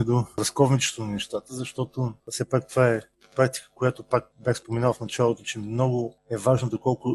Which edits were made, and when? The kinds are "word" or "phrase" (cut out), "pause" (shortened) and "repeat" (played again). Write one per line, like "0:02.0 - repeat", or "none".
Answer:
0:02.2 - pause